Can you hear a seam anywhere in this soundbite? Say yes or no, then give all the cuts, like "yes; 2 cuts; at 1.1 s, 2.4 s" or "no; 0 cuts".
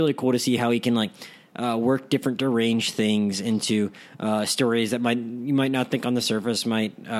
no; 0 cuts